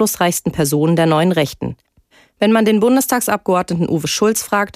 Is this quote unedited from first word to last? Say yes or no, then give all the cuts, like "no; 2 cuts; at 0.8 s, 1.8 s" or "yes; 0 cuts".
yes; 0 cuts